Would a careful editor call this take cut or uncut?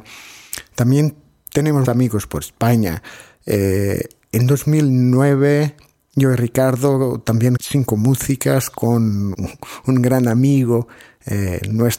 cut